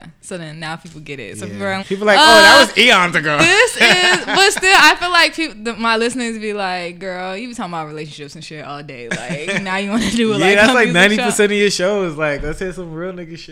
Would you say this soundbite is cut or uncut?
cut